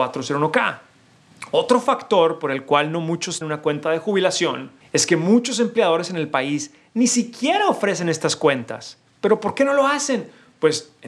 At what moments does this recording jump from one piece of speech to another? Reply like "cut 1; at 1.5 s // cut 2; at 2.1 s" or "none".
cut 1; at 3.4 s